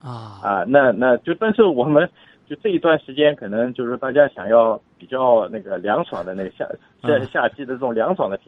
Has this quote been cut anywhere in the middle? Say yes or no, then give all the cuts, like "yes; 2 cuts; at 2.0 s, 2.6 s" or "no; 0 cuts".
no; 0 cuts